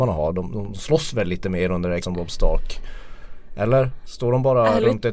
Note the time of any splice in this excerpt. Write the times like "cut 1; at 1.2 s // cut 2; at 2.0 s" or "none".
cut 1; at 2.0 s